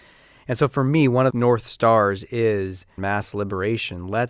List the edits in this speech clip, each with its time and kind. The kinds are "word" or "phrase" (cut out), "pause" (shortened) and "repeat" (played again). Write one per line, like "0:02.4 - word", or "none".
0:01.3 - word
0:03.0 - word